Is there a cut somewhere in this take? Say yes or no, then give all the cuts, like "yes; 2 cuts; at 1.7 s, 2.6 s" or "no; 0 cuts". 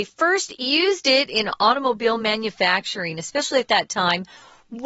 no; 0 cuts